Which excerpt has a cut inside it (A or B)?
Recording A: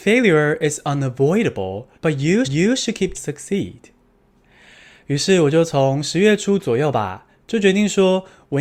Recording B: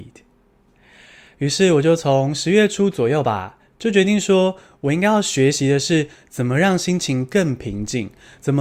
A